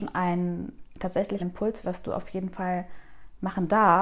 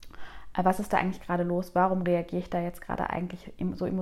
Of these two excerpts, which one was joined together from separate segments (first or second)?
first